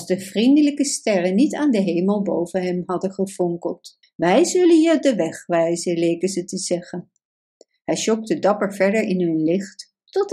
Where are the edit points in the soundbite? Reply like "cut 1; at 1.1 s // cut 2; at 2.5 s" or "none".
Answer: cut 1; at 4.0 s